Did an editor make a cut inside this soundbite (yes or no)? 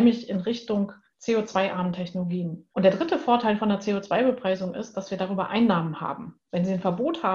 yes